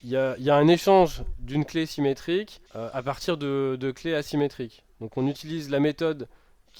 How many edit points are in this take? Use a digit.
1